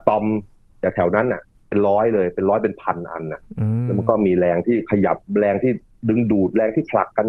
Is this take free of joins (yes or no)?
yes